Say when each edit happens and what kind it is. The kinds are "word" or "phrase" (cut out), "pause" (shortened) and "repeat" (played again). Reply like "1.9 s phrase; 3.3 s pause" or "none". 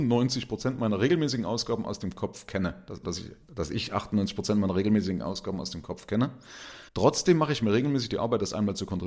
3.0 s word; 3.4 s pause; 6.9 s pause